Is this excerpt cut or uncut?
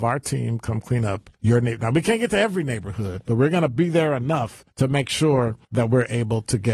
cut